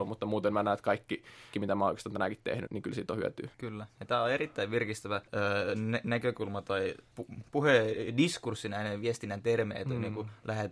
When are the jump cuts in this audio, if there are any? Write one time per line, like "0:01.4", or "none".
0:01.5
0:02.7
0:03.5
0:05.3
0:07.1
0:07.4